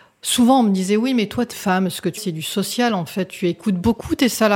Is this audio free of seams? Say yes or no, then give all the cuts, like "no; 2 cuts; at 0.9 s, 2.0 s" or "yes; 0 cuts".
no; 2 cuts; at 1.5 s, 2.2 s